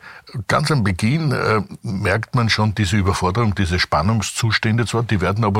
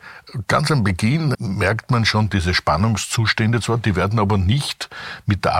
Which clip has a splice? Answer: second; 2 cuts; at 1.3 s, 2.3 s

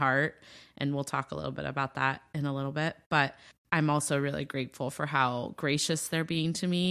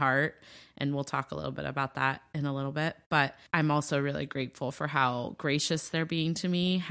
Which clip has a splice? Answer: second; 1 cut; at 3.5 s

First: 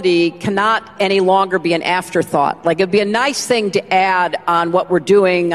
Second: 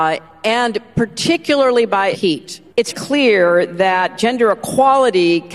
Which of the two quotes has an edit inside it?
second; 2 cuts; at 2.1 s, 2.9 s

